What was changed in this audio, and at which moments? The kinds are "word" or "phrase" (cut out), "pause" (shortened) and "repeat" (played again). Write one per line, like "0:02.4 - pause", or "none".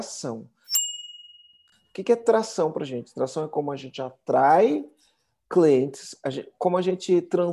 none

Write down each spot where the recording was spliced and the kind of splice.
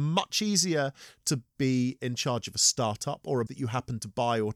0:01.5 - pause
0:03.5 - word

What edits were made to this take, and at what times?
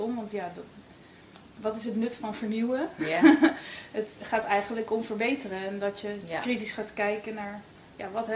none

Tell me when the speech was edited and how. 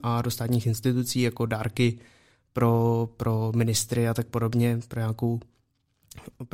none

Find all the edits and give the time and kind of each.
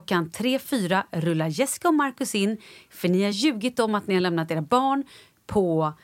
none

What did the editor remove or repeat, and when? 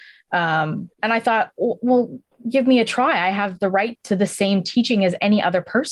0:00.9 - pause
0:03.9 - word

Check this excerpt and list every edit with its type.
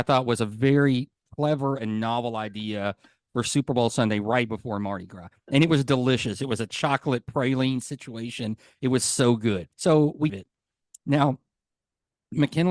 0:09.7 - pause
0:10.3 - phrase

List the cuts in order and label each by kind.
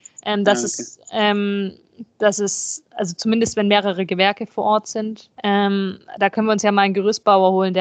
0:05.3 - pause

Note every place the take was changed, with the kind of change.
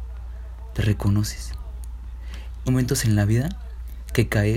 0:02.7 - word

